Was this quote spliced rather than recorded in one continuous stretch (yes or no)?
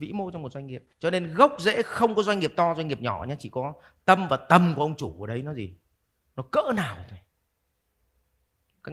yes